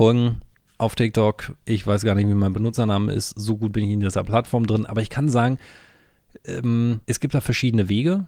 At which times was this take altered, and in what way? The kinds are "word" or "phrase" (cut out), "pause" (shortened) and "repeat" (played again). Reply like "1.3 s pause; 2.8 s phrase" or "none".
7.0 s pause